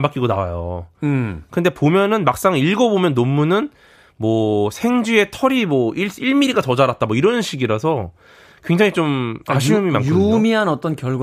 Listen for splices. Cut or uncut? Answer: uncut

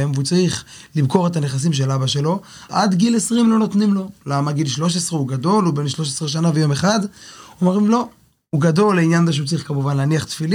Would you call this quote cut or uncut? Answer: cut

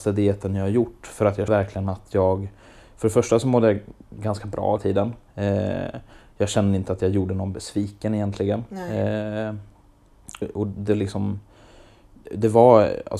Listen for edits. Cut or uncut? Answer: cut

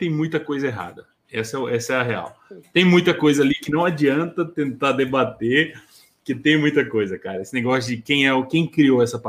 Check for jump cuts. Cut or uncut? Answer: uncut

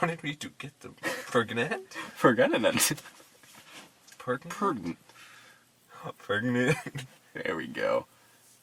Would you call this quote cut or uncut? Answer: uncut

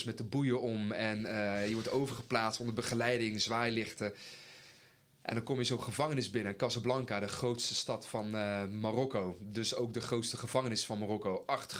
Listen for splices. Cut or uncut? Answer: uncut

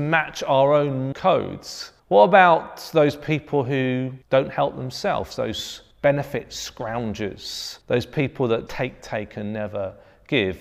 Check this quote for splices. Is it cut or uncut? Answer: cut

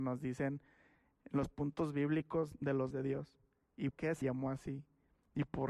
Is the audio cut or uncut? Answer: cut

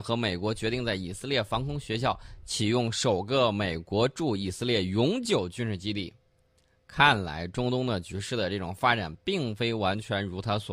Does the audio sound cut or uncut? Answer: uncut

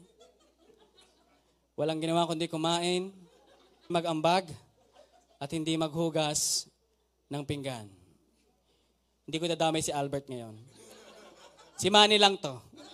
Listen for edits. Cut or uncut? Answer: cut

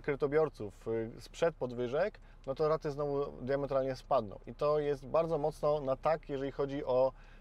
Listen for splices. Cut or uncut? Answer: uncut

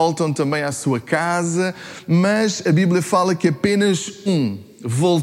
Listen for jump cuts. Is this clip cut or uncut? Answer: cut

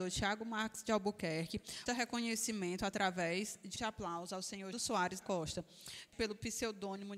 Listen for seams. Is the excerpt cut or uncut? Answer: cut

